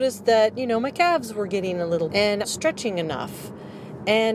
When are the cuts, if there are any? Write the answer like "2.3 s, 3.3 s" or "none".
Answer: 2.1 s, 2.4 s